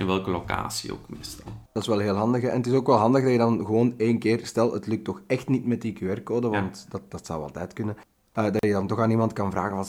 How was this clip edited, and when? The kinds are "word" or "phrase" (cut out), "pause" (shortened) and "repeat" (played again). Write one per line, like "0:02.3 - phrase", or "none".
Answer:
0:01.7 - pause